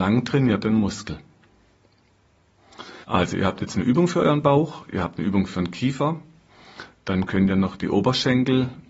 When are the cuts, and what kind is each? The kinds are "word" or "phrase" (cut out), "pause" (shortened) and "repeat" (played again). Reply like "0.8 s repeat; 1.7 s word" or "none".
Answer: 3.0 s pause